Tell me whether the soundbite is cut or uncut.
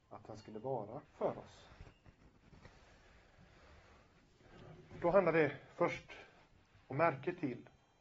cut